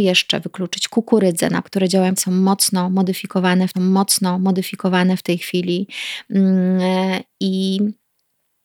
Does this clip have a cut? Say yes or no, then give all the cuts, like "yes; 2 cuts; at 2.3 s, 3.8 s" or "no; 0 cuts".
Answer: yes; 3 cuts; at 1.6 s, 2.2 s, 3.7 s